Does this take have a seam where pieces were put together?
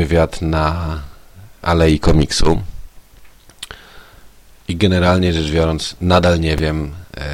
no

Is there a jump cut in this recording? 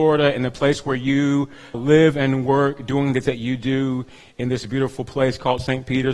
yes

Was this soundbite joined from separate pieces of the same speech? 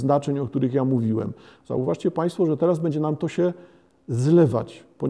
no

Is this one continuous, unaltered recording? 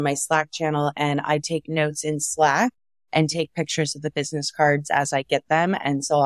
yes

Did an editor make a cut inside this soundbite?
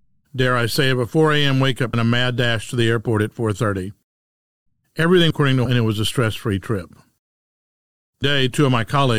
yes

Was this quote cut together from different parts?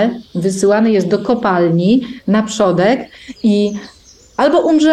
no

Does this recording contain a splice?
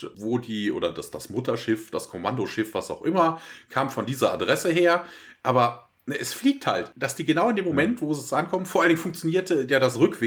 no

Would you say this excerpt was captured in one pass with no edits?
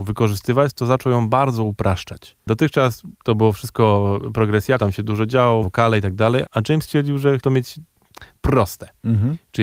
no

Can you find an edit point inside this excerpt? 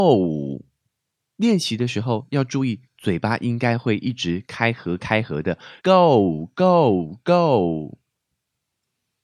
yes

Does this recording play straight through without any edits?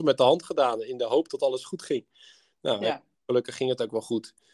yes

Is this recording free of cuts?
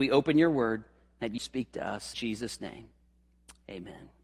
no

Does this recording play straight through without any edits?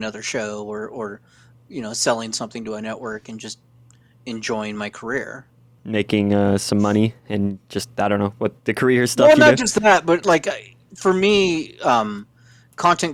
yes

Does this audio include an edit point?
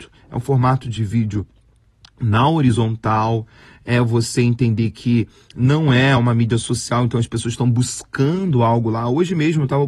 no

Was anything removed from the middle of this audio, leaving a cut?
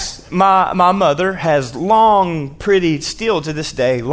no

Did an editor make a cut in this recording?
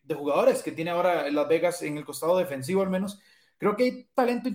no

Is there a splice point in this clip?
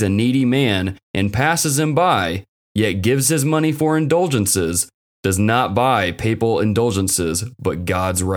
no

